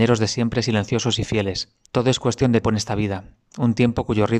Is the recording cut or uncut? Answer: cut